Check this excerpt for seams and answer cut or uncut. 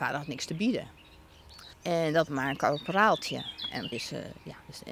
cut